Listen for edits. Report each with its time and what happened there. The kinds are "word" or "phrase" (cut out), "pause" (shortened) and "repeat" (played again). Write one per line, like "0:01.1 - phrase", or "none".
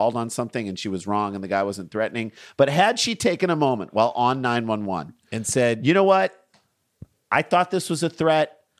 none